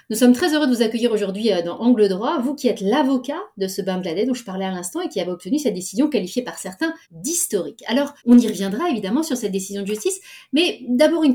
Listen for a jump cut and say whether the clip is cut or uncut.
cut